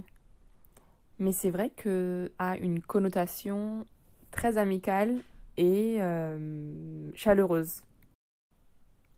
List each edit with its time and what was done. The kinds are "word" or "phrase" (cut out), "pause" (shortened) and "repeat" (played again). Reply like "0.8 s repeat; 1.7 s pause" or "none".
2.4 s word